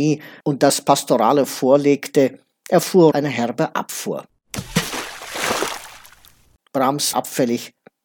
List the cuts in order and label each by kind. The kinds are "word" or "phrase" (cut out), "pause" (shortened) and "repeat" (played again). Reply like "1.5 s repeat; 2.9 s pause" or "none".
1.5 s word; 3.1 s word; 7.1 s word